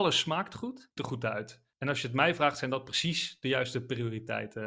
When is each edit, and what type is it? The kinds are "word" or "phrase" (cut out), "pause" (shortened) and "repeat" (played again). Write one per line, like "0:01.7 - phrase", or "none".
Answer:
0:01.0 - phrase
0:01.7 - pause